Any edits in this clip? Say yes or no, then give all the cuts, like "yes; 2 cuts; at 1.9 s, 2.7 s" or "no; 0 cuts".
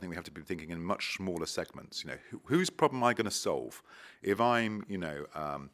no; 0 cuts